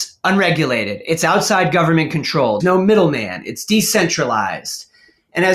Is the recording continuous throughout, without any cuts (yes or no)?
no